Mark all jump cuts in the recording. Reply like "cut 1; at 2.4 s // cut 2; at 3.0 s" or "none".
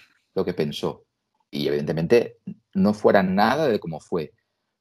none